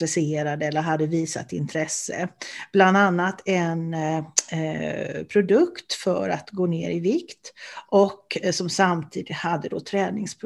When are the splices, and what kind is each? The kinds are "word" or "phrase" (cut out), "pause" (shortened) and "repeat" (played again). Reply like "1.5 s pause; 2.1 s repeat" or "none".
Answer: none